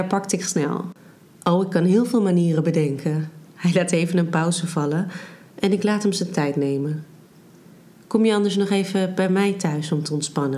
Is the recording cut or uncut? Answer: uncut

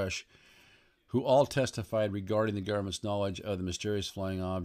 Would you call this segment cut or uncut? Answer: uncut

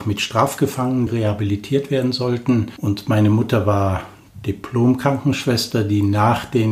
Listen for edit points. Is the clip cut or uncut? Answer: cut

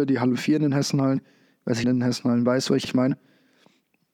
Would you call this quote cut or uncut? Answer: cut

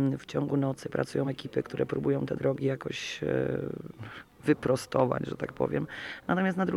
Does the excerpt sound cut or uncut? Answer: uncut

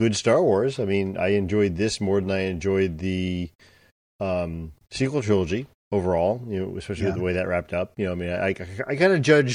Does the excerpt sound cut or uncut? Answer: uncut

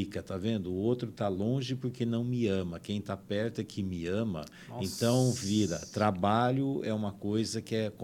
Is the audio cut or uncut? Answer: uncut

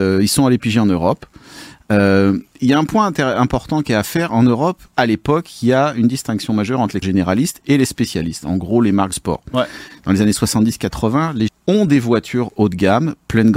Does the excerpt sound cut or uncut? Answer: cut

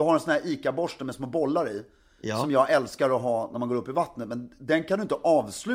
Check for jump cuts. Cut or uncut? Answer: uncut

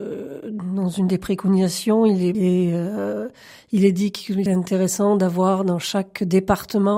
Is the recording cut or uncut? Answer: cut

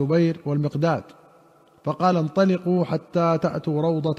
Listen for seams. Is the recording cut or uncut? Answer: uncut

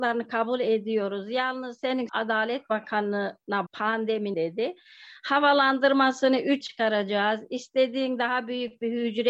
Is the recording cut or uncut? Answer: cut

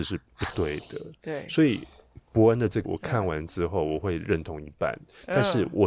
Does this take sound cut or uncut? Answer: cut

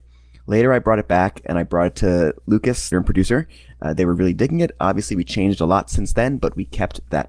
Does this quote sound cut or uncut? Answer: cut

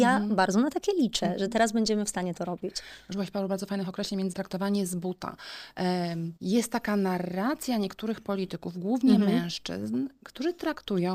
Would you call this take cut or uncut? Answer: cut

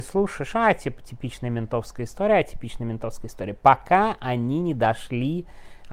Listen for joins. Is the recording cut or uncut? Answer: uncut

